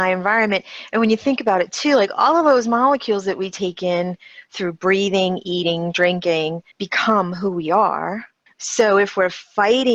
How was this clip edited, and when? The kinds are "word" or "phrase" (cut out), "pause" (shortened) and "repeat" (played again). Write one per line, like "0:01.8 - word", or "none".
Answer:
0:06.7 - pause
0:08.5 - pause